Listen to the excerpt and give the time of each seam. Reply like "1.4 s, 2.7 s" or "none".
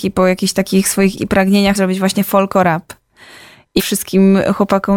1.2 s, 1.7 s, 3.8 s